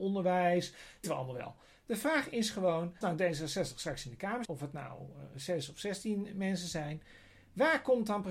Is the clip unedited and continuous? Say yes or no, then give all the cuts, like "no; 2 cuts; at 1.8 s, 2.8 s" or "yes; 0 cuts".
no; 3 cuts; at 1.0 s, 3.0 s, 4.4 s